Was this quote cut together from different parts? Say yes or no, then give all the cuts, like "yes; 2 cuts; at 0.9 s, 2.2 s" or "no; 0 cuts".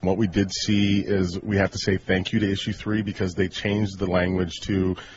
no; 0 cuts